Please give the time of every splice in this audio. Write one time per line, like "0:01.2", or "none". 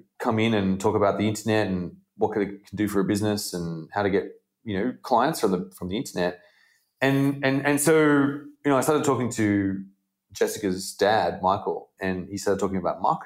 none